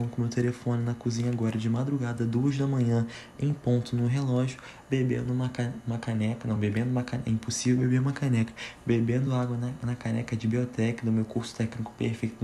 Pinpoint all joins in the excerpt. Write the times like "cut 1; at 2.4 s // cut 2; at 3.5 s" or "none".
none